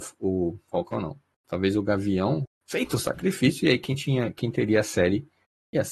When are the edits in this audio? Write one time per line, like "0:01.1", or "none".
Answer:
0:02.4